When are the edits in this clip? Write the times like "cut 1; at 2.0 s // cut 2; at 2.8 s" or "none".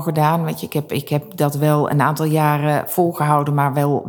none